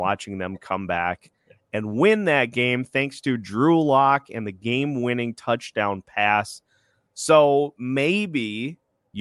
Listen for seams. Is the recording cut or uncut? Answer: uncut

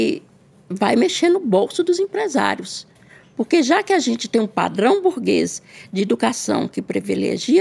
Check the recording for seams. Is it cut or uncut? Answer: uncut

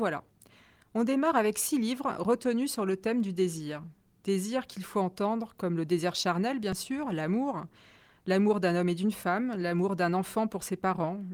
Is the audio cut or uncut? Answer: uncut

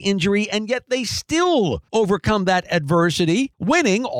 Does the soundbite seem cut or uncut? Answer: uncut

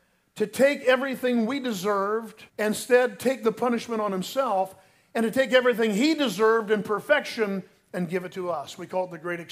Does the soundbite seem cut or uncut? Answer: cut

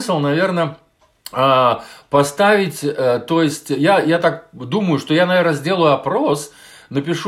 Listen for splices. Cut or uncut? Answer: uncut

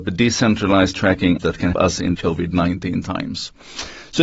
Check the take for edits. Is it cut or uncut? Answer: cut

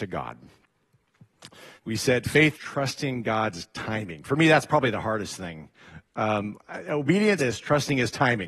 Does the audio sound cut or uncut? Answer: cut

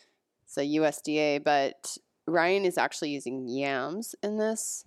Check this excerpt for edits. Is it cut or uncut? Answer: uncut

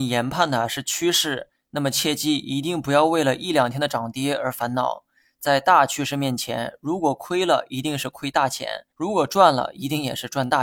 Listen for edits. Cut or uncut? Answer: cut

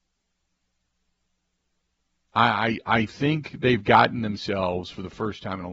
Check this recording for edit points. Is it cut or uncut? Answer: uncut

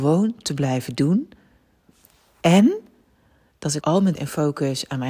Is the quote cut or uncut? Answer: cut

